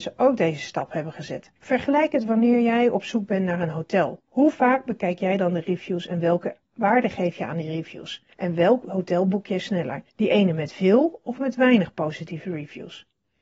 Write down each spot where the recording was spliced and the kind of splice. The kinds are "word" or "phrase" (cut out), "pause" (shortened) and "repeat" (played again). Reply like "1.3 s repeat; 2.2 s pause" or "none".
1.6 s pause; 4.3 s pause; 8.3 s pause; 10.1 s pause